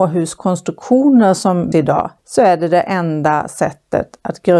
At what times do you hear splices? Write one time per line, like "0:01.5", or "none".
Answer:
0:01.7
0:02.2